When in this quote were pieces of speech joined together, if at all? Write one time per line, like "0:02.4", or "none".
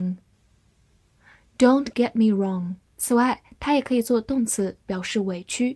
0:02.9